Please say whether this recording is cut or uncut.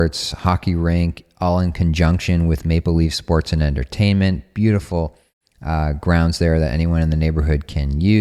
uncut